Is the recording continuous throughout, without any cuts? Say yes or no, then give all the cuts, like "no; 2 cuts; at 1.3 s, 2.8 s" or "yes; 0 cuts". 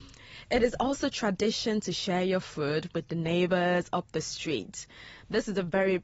yes; 0 cuts